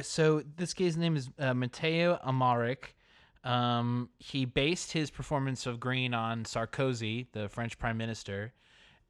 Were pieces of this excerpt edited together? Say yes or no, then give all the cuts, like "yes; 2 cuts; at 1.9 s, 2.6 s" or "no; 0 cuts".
no; 0 cuts